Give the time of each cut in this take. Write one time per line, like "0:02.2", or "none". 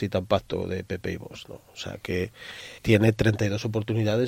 0:02.8